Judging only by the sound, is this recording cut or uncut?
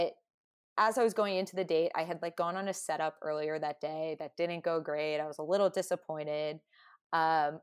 uncut